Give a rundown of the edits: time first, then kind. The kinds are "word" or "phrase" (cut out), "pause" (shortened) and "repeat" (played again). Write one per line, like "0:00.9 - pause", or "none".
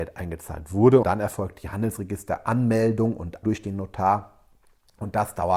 0:01.0 - word
0:03.4 - word